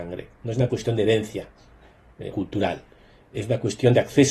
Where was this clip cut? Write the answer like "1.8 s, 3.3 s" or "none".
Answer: 2.3 s